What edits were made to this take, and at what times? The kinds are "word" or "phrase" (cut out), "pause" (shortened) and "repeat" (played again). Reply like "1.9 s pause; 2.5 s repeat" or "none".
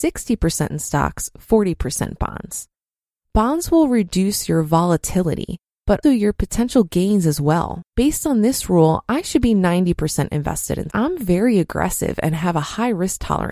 6.0 s word; 7.9 s pause; 10.9 s phrase